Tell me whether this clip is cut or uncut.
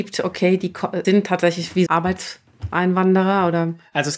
cut